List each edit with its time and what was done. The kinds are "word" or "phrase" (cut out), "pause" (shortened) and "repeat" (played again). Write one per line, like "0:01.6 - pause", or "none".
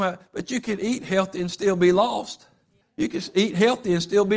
0:02.8 - pause